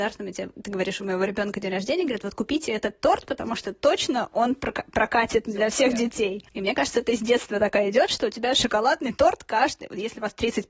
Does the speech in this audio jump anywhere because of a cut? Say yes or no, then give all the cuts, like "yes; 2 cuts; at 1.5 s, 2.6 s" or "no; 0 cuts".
no; 0 cuts